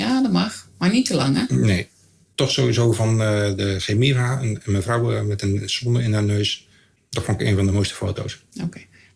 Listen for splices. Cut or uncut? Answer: uncut